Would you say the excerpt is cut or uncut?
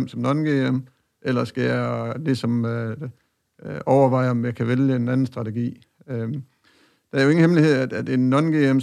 uncut